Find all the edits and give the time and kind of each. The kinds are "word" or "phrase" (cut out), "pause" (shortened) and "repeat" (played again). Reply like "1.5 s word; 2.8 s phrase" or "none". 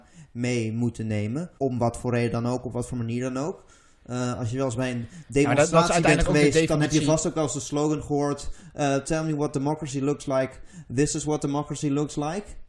1.6 s pause